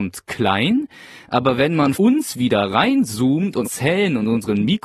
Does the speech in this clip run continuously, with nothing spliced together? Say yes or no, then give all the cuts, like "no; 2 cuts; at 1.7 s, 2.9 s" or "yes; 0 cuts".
no; 2 cuts; at 1.9 s, 3.6 s